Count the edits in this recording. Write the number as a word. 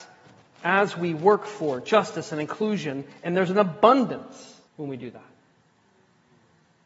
one